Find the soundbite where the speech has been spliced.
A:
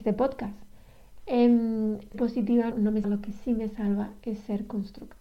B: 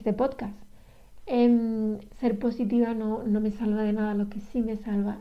A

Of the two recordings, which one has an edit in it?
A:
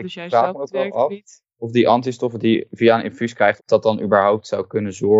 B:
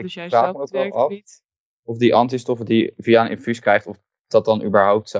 A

